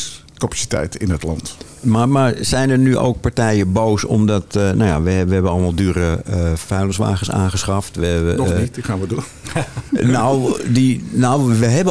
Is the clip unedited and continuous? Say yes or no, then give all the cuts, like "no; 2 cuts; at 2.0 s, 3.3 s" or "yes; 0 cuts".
yes; 0 cuts